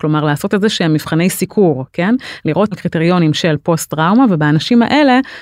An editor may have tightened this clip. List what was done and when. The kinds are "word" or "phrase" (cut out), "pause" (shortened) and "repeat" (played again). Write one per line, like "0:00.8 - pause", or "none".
0:02.7 - phrase